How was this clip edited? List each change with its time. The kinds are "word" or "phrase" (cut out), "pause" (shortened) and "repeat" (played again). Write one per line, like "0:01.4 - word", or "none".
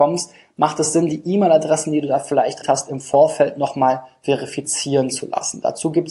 0:02.6 - word